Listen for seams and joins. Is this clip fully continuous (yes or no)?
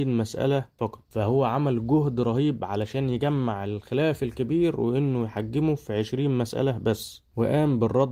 yes